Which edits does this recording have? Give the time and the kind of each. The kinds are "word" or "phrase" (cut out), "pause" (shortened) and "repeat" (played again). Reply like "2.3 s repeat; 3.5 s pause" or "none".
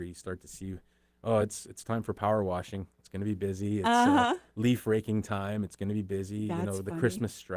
none